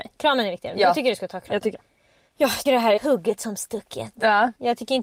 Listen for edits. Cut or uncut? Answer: cut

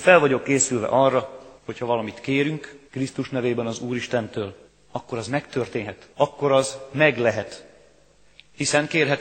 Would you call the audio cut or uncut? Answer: cut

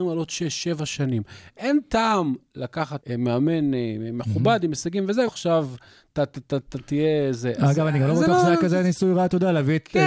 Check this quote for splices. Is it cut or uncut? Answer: cut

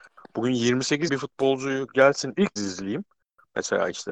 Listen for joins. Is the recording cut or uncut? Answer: cut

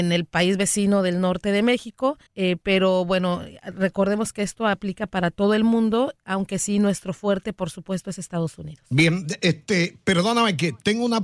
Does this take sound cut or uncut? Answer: cut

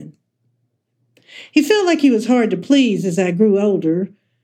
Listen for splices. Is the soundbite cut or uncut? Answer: uncut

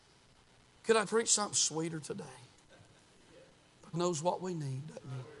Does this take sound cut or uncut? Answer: cut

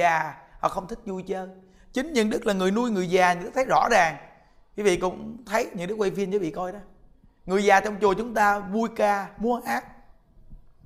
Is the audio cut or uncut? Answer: uncut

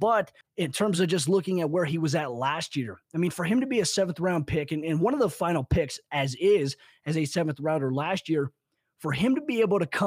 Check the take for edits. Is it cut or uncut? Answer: uncut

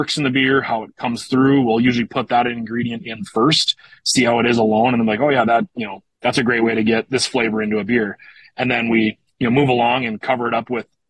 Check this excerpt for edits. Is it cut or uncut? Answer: uncut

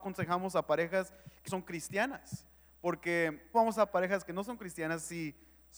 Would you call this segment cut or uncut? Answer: cut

